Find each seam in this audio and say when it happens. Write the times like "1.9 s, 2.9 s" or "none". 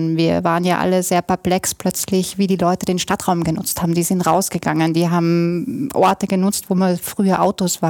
none